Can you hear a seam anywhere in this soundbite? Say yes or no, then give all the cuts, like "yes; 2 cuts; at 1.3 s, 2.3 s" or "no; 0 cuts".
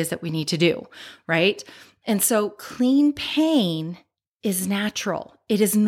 no; 0 cuts